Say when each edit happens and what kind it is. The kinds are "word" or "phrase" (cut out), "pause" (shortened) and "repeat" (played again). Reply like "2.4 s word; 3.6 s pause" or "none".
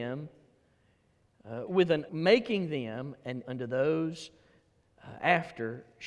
1.7 s word; 2.1 s word; 3.4 s word